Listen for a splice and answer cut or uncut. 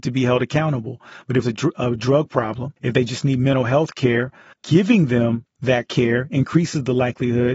cut